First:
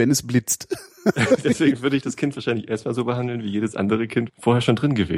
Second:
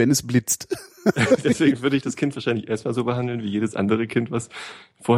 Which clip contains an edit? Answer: first; 1 cut; at 4.3 s

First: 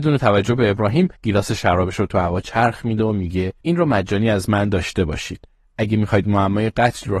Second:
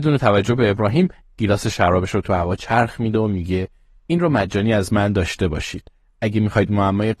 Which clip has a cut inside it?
first; 2 cuts; at 1.2 s, 3.6 s

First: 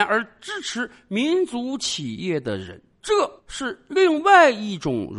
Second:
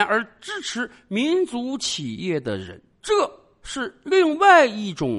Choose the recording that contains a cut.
first; 1 cut; at 3.4 s

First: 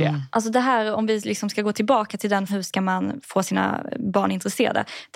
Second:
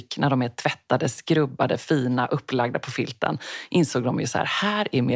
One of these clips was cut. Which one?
first; 1 cut; at 2.5 s

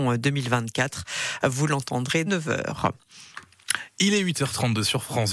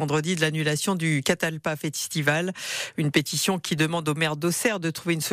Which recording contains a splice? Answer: first; 1 cut; at 2.3 s

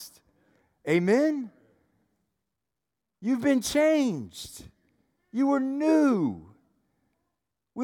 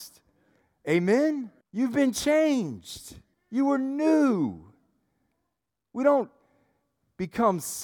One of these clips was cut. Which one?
second; 2 cuts; at 1.6 s, 3.3 s

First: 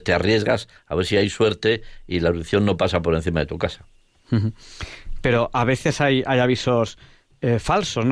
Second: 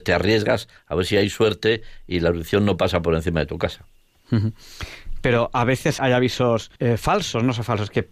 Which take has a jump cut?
second; 2 cuts; at 6.0 s, 6.8 s

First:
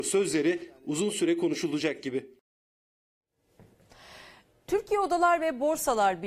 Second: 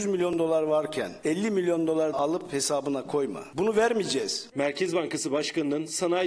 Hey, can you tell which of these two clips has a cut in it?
second; 1 cut; at 2.1 s

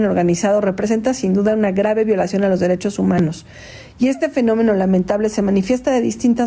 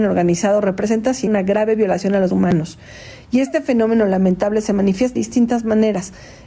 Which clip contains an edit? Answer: second; 3 cuts; at 1.3 s, 2.3 s, 5.2 s

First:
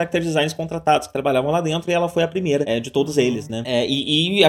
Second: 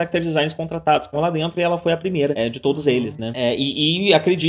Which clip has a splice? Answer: second; 1 cut; at 1.1 s

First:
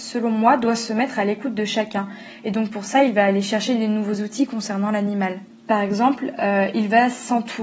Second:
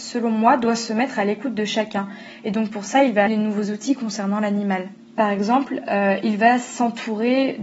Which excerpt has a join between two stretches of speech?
second; 1 cut; at 3.3 s

